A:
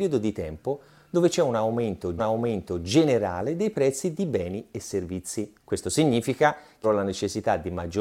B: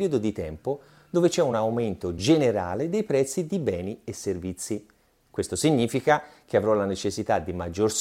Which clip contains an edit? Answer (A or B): A